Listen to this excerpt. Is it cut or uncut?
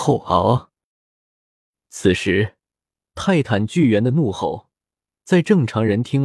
uncut